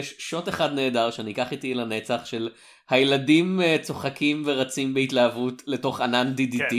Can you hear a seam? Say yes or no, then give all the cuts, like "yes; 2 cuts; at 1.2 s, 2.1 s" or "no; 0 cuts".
no; 0 cuts